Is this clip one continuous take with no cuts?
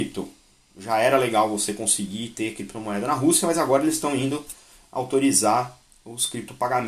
yes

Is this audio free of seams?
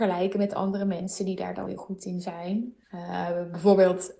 no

